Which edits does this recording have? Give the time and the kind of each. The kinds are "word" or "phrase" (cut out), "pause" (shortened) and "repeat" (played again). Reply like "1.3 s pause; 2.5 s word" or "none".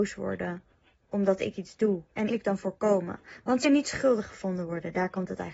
2.3 s phrase; 3.6 s word